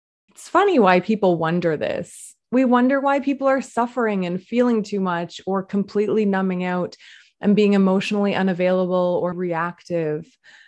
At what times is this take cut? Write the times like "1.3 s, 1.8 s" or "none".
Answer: 9.3 s